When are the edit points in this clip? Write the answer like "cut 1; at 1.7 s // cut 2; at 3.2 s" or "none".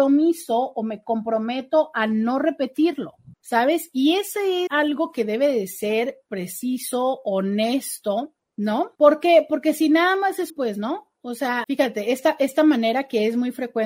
cut 1; at 3.3 s // cut 2; at 4.7 s // cut 3; at 8.9 s // cut 4; at 10.5 s // cut 5; at 11.6 s